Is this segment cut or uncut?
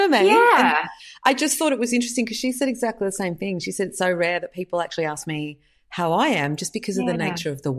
uncut